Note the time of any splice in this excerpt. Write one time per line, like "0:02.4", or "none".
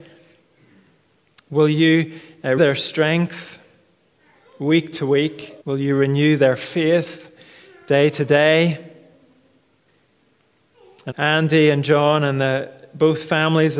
0:02.6
0:05.6
0:11.1

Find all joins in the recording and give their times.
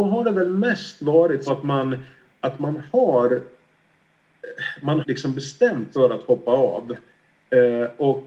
0:01.5
0:05.0
0:05.9

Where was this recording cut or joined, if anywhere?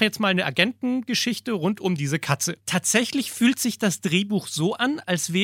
0:02.6

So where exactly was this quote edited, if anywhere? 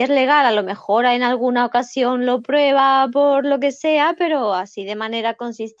none

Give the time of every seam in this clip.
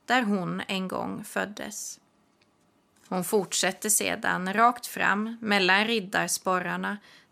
none

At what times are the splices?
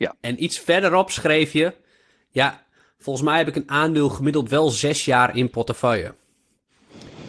none

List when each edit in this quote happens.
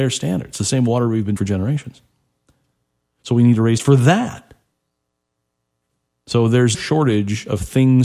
0:01.4
0:03.8
0:06.7

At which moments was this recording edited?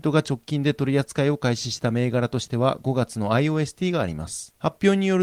none

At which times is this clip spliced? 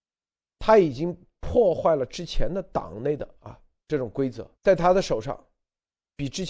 0:03.8
0:04.5

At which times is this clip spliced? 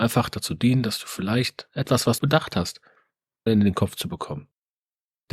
0:02.2
0:03.5

